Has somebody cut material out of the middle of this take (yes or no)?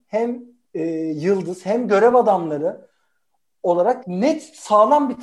yes